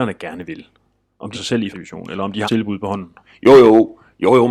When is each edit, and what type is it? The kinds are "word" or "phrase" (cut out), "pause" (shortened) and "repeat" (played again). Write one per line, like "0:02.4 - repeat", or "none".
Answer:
0:01.3 - word
0:01.7 - word
0:02.4 - word